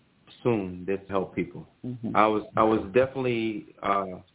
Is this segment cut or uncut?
cut